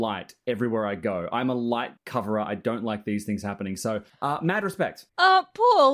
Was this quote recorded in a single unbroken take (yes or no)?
no